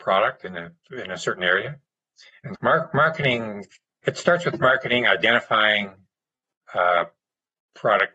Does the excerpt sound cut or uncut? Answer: cut